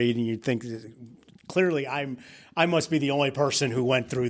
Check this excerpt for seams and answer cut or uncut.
uncut